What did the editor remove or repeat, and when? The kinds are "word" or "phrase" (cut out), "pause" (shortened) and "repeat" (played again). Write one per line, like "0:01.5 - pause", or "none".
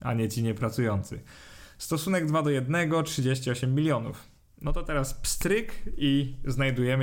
none